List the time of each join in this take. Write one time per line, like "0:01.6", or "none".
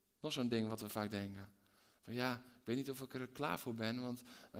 none